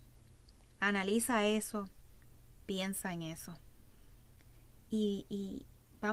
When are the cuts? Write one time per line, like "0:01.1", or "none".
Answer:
none